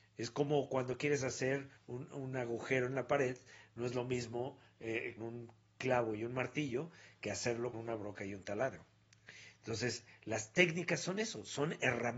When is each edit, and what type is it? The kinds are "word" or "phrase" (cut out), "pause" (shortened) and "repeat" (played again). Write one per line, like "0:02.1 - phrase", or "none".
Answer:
0:01.8 - pause
0:05.2 - phrase
0:07.7 - word